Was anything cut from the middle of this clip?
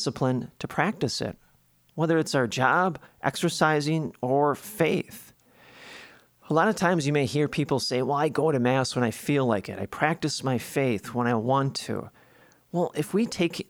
no; 0 cuts

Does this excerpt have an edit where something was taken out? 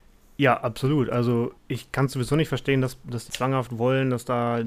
yes; 2 cuts; at 1.6 s, 3.3 s

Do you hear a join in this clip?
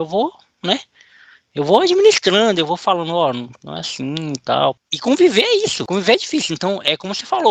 no; 0 cuts

